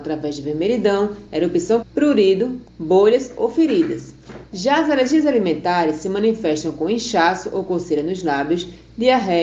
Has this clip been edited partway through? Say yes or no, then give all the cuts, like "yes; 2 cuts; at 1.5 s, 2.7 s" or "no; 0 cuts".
yes; 2 cuts; at 1.8 s, 2.7 s